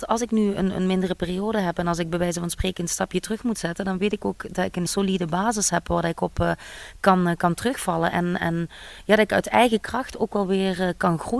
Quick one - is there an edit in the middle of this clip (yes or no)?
yes